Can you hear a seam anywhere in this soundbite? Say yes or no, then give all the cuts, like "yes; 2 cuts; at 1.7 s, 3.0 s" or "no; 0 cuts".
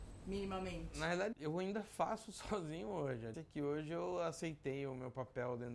yes; 2 cuts; at 1.3 s, 3.3 s